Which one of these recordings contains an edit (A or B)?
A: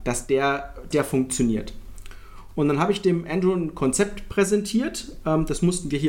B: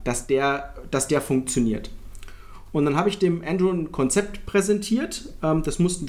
A